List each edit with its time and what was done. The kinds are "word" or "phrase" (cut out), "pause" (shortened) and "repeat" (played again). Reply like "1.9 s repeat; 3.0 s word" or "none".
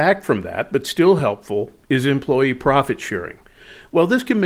none